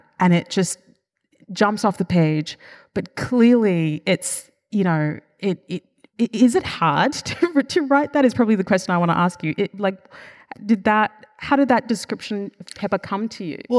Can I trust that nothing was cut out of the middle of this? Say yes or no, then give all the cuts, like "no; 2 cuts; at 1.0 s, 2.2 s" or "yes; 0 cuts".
yes; 0 cuts